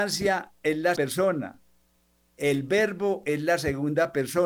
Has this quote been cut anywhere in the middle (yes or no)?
yes